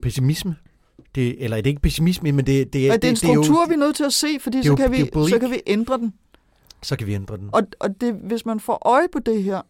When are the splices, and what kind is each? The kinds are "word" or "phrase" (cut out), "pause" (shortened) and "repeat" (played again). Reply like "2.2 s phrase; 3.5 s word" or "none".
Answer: none

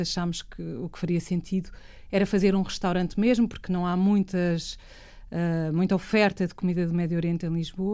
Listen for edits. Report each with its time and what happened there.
none

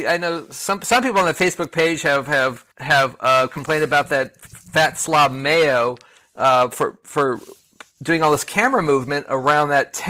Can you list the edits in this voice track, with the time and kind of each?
2.7 s pause

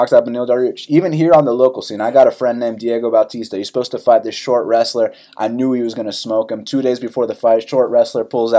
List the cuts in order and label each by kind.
none

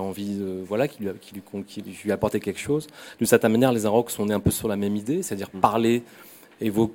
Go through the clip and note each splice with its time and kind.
none

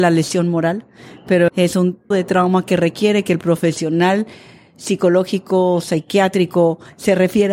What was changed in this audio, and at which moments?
1.5 s word; 2.1 s word

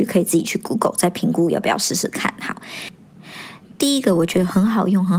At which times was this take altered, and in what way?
none

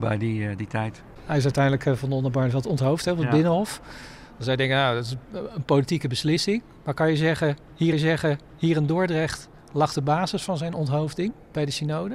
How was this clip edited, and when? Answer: 7.9 s repeat

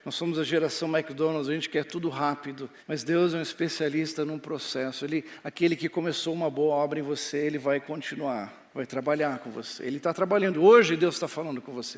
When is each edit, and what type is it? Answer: 2.8 s pause; 8.7 s pause

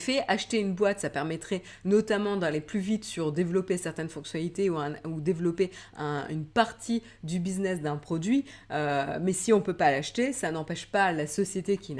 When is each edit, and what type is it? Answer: none

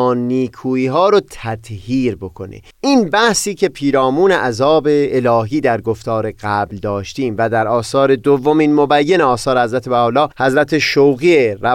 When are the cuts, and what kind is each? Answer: 2.7 s pause; 10.3 s pause

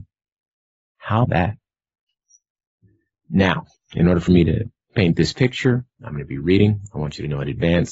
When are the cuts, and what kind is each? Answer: 1.2 s word

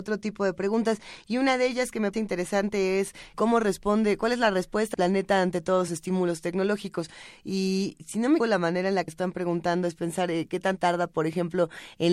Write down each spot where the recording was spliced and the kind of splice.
2.1 s word; 3.3 s word; 4.9 s word; 5.9 s word; 8.4 s word; 9.1 s word; 10.8 s word

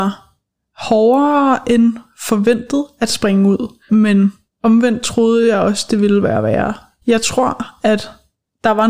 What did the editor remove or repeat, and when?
none

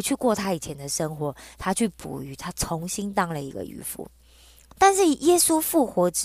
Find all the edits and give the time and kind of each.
none

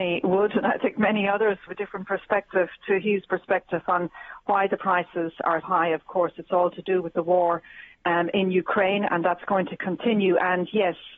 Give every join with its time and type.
1.7 s phrase; 3.2 s phrase; 5.6 s word

